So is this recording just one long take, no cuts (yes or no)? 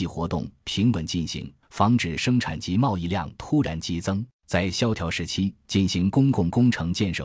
no